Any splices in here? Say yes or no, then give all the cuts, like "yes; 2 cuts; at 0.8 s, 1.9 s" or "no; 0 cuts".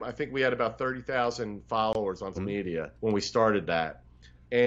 yes; 2 cuts; at 2.3 s, 2.9 s